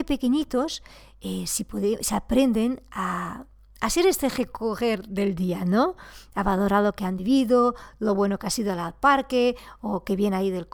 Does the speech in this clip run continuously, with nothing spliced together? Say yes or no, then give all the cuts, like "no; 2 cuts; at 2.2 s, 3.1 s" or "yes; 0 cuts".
yes; 0 cuts